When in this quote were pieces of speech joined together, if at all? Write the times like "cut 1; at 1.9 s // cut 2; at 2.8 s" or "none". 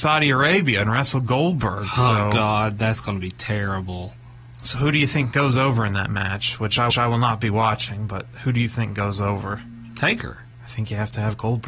cut 1; at 6.9 s // cut 2; at 10.5 s